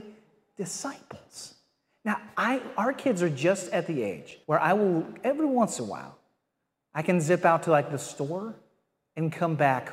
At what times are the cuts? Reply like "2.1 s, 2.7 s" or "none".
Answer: 4.4 s